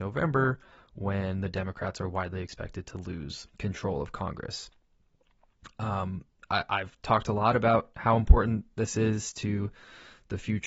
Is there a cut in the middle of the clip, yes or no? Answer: yes